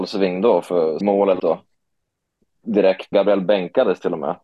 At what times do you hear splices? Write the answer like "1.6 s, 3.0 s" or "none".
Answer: 1.0 s, 1.4 s, 3.1 s